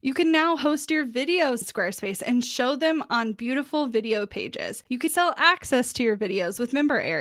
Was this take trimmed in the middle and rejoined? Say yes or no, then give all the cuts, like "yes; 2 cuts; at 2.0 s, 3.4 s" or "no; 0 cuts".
yes; 2 cuts; at 1.6 s, 5.1 s